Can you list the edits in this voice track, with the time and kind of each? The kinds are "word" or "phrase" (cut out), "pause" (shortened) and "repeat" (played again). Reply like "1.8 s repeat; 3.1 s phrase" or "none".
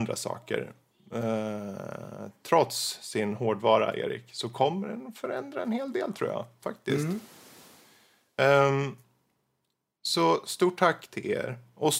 none